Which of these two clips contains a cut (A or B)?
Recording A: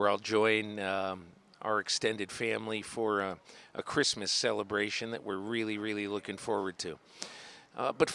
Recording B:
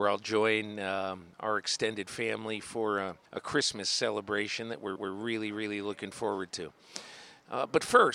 B